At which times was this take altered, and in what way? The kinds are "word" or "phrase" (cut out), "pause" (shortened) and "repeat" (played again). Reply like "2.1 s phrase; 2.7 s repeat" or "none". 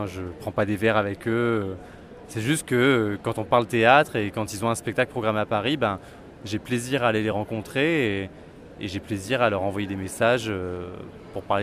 none